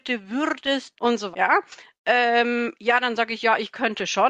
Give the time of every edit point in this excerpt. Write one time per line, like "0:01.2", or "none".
0:00.9
0:01.3